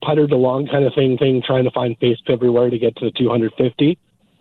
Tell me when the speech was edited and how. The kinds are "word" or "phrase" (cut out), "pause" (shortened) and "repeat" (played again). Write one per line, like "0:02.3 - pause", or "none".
0:01.2 - repeat
0:02.2 - word